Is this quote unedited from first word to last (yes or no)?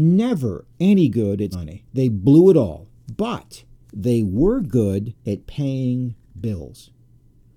no